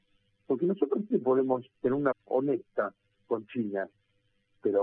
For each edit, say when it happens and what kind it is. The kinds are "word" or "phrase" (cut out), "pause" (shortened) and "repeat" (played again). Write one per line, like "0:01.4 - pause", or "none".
0:01.1 - word
0:01.7 - pause
0:02.1 - phrase